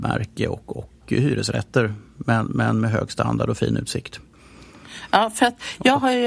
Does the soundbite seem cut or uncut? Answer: uncut